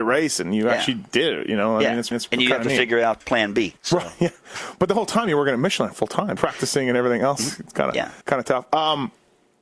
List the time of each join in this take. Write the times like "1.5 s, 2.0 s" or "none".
2.1 s, 3.2 s, 3.8 s, 6.4 s, 8.2 s